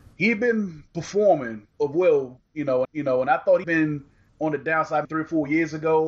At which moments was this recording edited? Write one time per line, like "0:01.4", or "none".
0:01.7
0:02.8
0:03.6
0:04.3
0:05.0